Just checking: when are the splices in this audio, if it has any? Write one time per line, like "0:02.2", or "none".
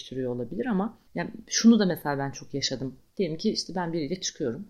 0:01.1